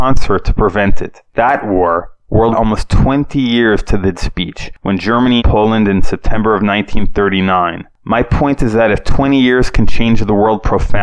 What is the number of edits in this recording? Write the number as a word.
four